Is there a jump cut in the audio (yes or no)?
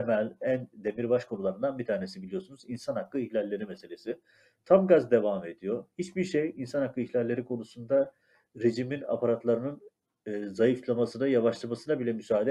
no